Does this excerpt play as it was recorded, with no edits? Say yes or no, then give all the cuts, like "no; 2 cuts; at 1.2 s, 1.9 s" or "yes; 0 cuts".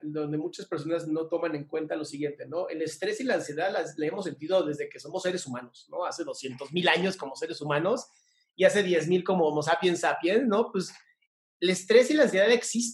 yes; 0 cuts